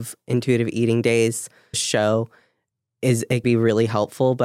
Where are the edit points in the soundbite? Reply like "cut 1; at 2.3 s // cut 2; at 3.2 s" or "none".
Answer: cut 1; at 1.7 s // cut 2; at 2.7 s // cut 3; at 3.4 s

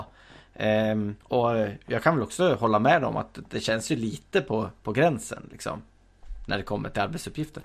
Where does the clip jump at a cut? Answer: cut 1; at 1.2 s

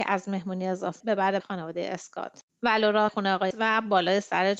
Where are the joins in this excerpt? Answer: cut 1; at 1.0 s // cut 2; at 1.4 s // cut 3; at 2.5 s // cut 4; at 3.1 s // cut 5; at 3.5 s

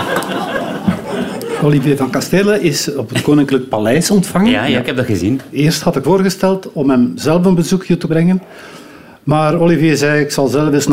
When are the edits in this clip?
cut 1; at 6.0 s // cut 2; at 8.1 s

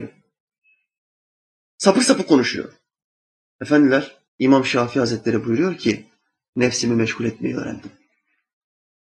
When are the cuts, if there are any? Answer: cut 1; at 4.3 s

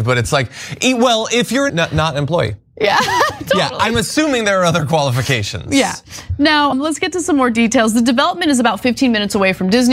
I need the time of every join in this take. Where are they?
cut 1; at 1.7 s // cut 2; at 6.7 s

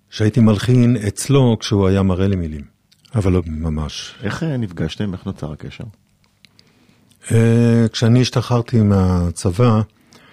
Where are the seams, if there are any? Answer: cut 1; at 2.9 s // cut 2; at 3.4 s

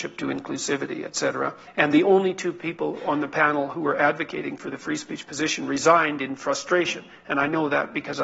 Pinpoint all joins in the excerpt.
cut 1; at 1.7 s

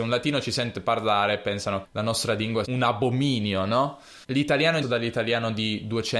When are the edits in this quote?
cut 1; at 1.8 s // cut 2; at 2.6 s // cut 3; at 4.2 s // cut 4; at 4.8 s

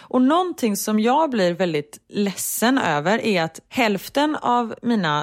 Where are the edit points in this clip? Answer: none

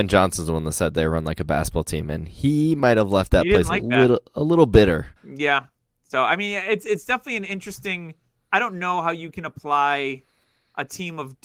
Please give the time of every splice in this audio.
cut 1; at 5.2 s

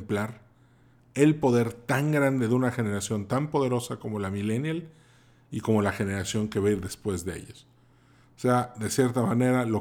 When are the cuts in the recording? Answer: none

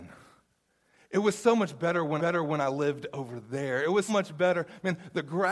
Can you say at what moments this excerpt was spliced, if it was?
cut 1; at 2.2 s // cut 2; at 4.1 s

